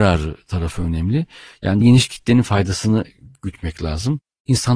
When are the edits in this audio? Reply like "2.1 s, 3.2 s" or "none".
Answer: 1.8 s